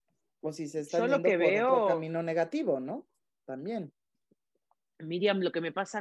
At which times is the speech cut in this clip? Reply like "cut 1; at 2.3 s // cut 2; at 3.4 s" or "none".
none